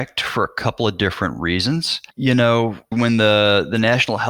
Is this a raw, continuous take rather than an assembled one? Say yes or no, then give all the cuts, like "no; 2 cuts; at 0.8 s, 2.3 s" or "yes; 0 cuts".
no; 2 cuts; at 2.1 s, 2.9 s